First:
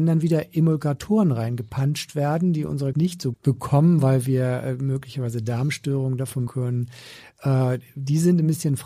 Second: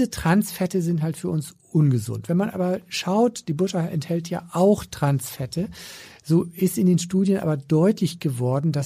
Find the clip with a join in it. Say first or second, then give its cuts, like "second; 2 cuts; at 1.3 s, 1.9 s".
first; 3 cuts; at 2.9 s, 3.3 s, 6.5 s